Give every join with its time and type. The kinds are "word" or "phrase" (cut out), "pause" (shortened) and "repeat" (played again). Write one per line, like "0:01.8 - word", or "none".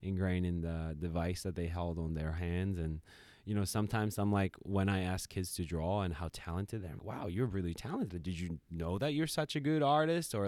0:07.0 - word